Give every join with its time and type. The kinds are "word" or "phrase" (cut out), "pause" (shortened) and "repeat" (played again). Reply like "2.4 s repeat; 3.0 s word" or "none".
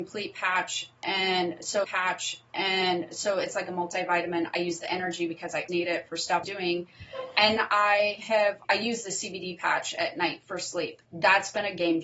1.8 s repeat; 5.7 s word; 6.4 s word; 7.6 s word; 8.6 s word; 11.0 s pause

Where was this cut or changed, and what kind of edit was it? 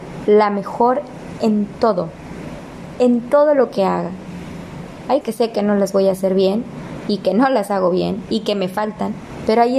5.2 s word

